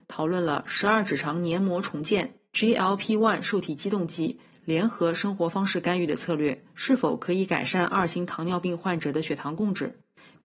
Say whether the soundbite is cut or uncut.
cut